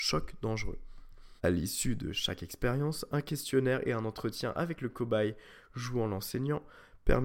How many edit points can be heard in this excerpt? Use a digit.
1